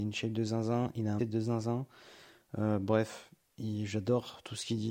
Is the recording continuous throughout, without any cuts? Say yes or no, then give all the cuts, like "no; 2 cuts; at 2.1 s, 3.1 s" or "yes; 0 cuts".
no; 1 cut; at 1.2 s